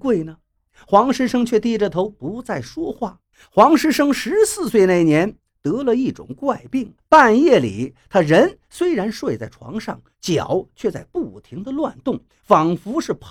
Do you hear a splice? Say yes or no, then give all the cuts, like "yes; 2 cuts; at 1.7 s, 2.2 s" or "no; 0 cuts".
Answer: yes; 2 cuts; at 3.3 s, 7.0 s